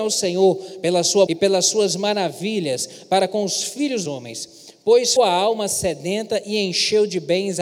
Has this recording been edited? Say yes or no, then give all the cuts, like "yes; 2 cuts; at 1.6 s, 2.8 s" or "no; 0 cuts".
yes; 3 cuts; at 1.3 s, 4.1 s, 5.2 s